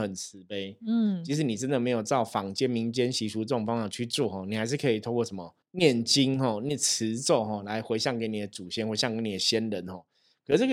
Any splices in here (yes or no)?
yes